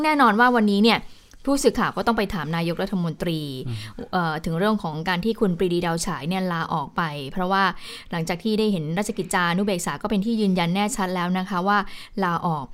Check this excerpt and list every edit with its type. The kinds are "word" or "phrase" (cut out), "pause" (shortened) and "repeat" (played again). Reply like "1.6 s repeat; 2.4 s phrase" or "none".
none